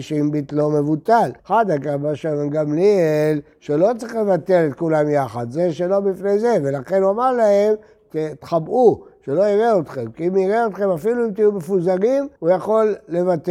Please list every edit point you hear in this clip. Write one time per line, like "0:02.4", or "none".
0:01.4
0:12.4